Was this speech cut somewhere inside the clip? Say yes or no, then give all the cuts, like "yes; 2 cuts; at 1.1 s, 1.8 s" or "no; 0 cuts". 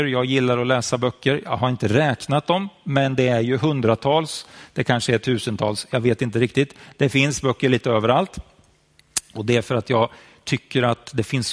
no; 0 cuts